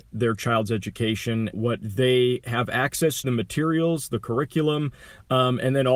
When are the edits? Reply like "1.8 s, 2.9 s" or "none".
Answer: 1.5 s, 3.2 s